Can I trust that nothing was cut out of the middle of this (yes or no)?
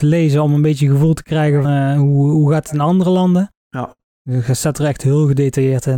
no